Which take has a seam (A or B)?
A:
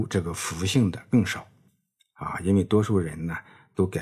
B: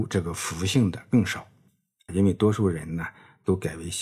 B